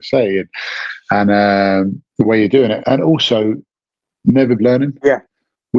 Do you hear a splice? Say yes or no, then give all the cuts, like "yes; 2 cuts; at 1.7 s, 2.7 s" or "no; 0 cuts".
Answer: yes; 3 cuts; at 2.1 s, 2.8 s, 4.6 s